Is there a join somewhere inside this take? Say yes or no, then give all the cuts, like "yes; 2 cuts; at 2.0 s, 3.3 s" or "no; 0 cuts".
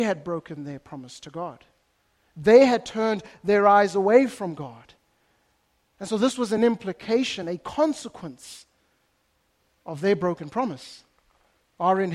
no; 0 cuts